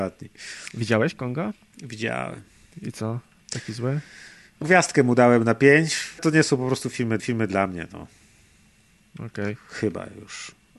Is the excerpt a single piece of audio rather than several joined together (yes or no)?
no